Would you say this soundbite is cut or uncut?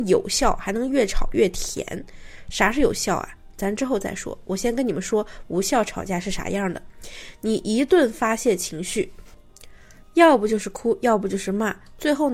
uncut